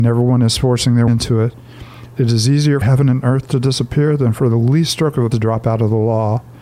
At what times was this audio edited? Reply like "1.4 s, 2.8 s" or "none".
1.1 s, 2.8 s, 5.3 s